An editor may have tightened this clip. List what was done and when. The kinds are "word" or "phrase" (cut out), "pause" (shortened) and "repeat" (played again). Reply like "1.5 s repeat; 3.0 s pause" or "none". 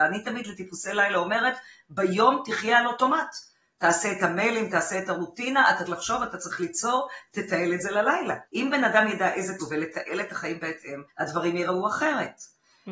5.9 s word; 8.5 s pause; 9.6 s word; 11.1 s pause